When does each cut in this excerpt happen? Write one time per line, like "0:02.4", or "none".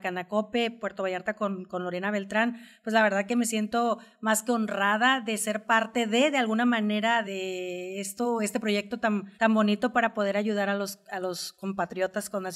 0:07.2
0:09.3